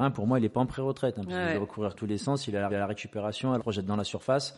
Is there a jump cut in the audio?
yes; 3 cuts; at 1.9 s, 2.7 s, 3.6 s

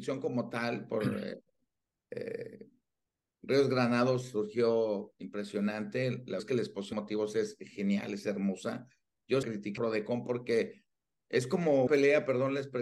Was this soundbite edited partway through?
yes; 6 cuts; at 6.4 s, 6.9 s, 9.4 s, 9.8 s, 11.1 s, 11.9 s

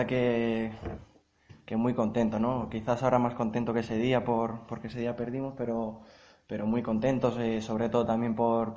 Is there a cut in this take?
no; 0 cuts

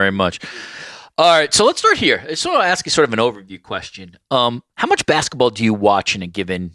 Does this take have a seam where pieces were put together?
no; 0 cuts

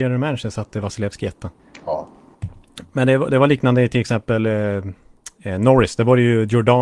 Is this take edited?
no; 0 cuts

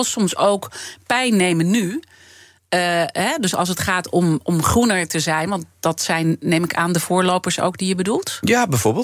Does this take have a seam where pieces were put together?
no; 0 cuts

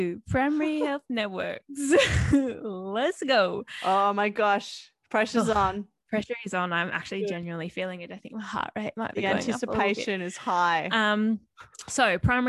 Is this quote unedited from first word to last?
yes; 0 cuts

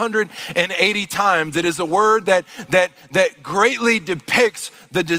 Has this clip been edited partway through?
no; 0 cuts

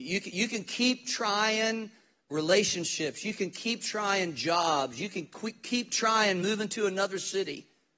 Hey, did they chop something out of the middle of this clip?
no; 0 cuts

